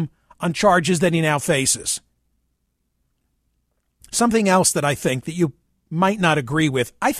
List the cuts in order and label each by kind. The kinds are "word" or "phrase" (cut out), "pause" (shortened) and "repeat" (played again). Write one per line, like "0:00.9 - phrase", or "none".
none